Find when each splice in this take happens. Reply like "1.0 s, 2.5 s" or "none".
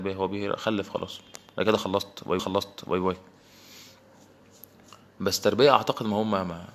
2.4 s